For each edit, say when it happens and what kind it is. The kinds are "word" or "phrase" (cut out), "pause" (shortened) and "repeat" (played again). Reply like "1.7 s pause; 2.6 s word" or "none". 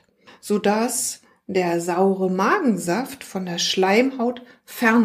none